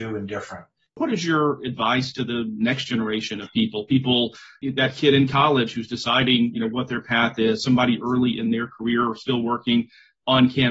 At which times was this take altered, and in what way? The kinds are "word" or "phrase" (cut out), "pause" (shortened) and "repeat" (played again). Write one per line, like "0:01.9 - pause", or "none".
none